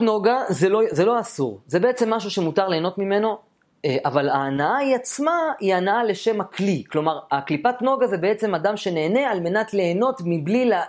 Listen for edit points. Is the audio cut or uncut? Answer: uncut